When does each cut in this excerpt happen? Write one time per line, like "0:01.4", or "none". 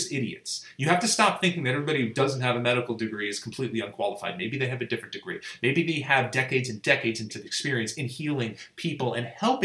0:07.3